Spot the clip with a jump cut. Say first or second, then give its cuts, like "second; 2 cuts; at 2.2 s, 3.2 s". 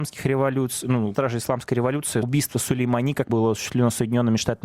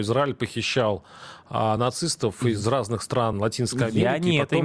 first; 3 cuts; at 1.1 s, 2.2 s, 3.3 s